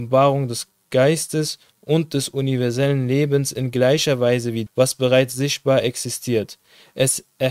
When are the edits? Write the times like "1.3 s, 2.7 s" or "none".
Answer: 4.7 s